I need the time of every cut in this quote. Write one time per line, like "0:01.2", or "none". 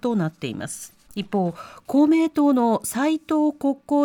0:01.0